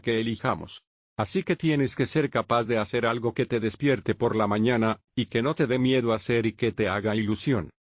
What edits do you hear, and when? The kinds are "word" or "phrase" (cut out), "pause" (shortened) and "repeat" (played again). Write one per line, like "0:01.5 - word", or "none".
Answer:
none